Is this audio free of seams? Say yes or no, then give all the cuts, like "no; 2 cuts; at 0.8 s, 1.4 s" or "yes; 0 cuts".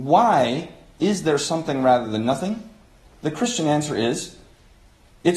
yes; 0 cuts